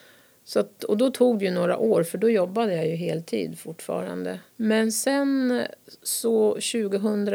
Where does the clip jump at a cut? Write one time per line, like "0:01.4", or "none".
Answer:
0:04.5